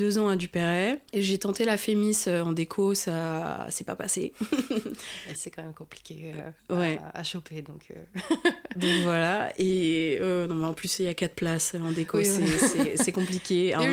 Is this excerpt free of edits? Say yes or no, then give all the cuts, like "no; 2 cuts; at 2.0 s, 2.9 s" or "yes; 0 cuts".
no; 2 cuts; at 1.1 s, 5.3 s